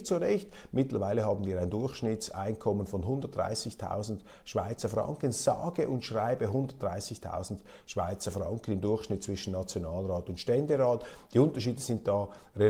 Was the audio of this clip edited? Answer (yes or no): no